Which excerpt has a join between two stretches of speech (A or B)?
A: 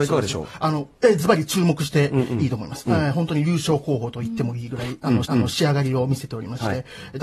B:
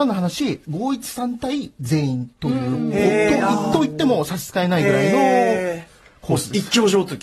A